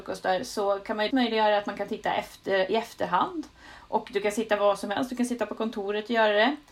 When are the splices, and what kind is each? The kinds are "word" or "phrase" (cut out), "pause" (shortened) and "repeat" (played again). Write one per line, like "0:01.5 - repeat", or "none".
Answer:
0:01.1 - word